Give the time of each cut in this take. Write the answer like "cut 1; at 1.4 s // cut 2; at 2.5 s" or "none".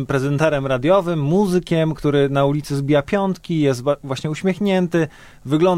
none